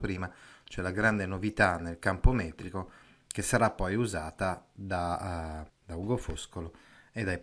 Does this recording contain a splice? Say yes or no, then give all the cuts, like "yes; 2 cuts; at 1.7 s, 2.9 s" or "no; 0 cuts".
yes; 1 cut; at 5.7 s